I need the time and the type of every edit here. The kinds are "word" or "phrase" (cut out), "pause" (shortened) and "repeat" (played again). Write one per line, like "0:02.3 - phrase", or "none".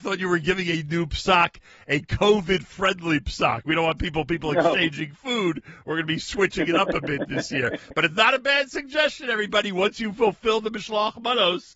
none